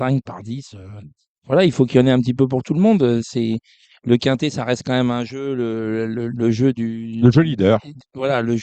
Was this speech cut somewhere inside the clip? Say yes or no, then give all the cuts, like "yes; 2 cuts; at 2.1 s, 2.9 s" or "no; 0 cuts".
no; 0 cuts